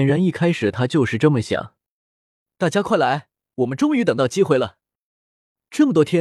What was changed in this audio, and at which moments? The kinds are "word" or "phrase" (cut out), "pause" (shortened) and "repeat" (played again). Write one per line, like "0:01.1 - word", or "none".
none